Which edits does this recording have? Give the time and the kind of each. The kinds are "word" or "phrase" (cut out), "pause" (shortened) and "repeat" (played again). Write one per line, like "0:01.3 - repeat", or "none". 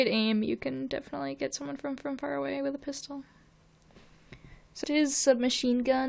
0:02.0 - repeat
0:04.8 - word